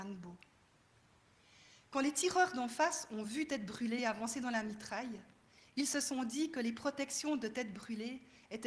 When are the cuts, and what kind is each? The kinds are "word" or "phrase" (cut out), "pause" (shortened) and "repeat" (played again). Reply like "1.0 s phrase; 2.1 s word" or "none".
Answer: none